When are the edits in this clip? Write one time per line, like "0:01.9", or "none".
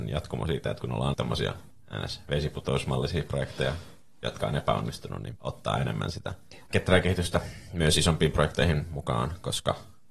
0:01.1
0:05.4
0:06.7